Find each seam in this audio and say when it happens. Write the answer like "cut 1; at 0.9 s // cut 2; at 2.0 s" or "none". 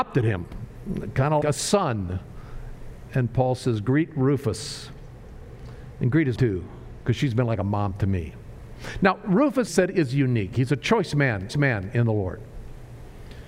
cut 1; at 1.4 s // cut 2; at 6.4 s // cut 3; at 9.7 s // cut 4; at 11.5 s